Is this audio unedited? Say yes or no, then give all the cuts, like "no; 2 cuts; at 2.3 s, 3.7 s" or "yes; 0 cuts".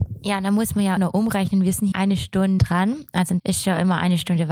no; 4 cuts; at 1.0 s, 1.9 s, 2.6 s, 3.4 s